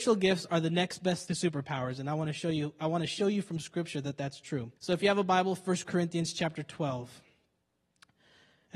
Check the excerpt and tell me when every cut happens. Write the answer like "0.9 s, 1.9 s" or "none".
1.3 s, 4.8 s